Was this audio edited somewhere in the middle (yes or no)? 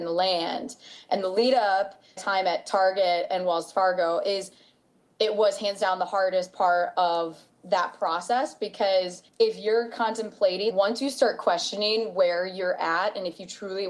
yes